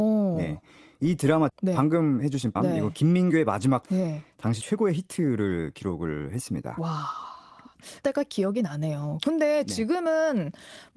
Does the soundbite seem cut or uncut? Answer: cut